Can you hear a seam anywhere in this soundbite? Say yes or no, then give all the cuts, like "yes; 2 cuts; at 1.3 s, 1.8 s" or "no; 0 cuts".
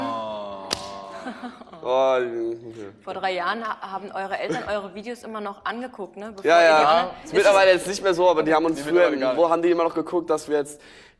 no; 0 cuts